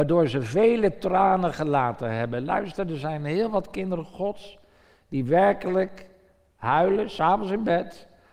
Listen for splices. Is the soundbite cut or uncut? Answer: uncut